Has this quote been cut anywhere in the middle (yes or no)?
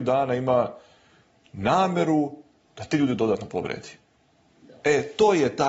no